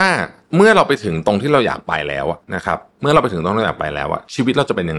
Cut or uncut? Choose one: cut